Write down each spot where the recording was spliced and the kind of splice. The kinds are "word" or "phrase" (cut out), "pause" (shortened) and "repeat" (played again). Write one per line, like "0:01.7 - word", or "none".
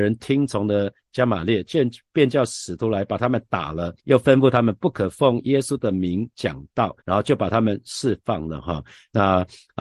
0:04.0 - pause
0:07.0 - pause